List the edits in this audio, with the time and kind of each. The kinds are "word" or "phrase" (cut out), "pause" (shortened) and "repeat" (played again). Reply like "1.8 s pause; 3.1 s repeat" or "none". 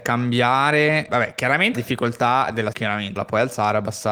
1.1 s word; 1.7 s word; 2.7 s word; 3.2 s word